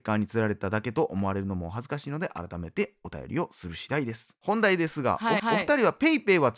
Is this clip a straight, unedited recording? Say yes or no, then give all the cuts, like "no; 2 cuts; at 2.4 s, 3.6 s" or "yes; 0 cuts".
no; 1 cut; at 5.4 s